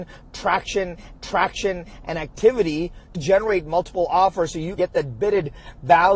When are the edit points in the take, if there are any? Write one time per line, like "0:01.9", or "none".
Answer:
0:01.1
0:03.1
0:04.8